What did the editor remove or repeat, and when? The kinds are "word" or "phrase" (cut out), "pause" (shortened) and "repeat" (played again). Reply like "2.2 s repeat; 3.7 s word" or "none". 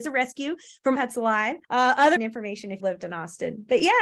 1.0 s word; 1.6 s pause; 2.2 s word; 2.8 s word